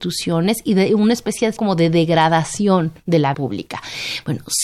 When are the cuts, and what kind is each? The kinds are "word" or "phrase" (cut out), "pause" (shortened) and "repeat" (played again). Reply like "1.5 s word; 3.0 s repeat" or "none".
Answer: 1.6 s word; 3.0 s pause; 3.3 s word